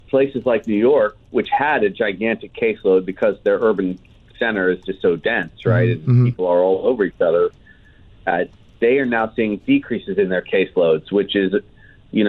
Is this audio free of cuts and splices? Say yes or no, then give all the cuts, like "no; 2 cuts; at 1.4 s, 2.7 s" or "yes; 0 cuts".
yes; 0 cuts